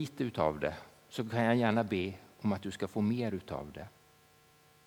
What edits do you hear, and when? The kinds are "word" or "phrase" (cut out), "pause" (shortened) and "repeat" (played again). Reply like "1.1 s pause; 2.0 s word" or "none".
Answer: none